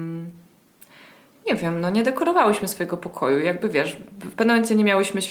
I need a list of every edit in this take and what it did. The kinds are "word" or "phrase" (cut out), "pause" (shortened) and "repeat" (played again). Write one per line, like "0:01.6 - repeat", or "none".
none